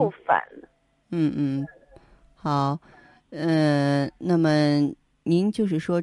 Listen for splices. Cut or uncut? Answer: uncut